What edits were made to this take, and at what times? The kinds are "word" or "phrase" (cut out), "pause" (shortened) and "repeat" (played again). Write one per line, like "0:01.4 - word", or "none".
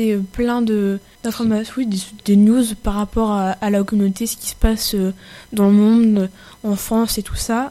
none